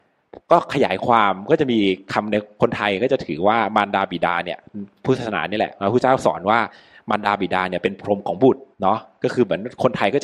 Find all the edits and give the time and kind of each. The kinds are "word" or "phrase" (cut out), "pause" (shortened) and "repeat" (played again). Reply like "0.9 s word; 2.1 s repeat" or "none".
8.7 s pause